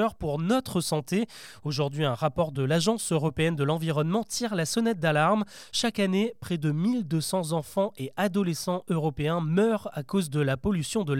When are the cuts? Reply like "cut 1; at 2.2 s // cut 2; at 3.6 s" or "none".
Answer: none